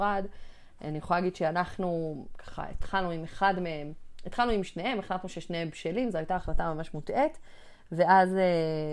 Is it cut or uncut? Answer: uncut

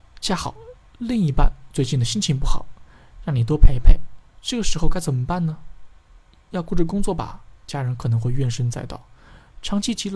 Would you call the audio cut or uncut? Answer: cut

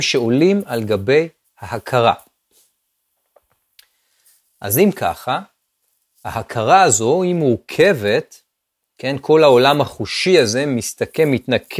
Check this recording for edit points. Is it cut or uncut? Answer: uncut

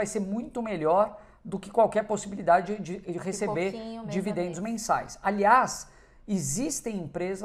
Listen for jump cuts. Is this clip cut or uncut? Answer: uncut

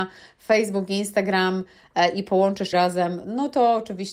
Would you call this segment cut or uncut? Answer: cut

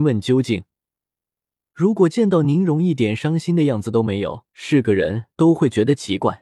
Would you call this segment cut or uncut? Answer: cut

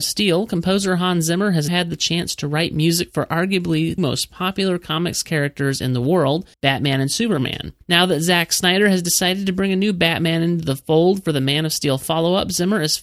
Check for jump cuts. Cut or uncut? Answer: cut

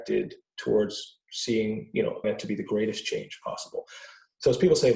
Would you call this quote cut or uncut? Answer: cut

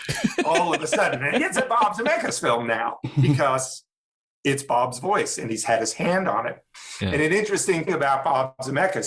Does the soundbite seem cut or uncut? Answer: cut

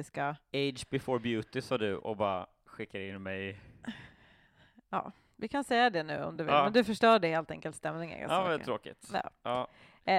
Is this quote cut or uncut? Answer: uncut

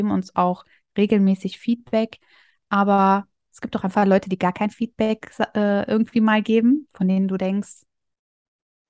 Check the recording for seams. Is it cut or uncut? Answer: uncut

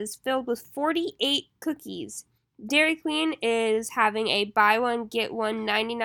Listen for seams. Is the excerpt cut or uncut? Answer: cut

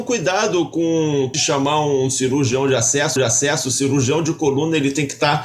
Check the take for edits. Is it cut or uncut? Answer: cut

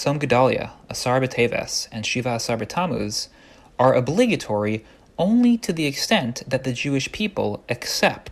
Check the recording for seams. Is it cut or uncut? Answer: uncut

